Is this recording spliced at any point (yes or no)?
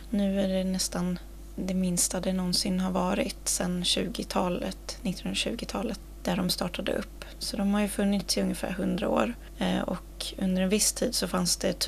no